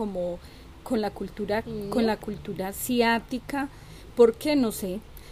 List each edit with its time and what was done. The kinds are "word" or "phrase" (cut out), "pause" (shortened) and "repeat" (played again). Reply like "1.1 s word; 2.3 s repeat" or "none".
1.6 s word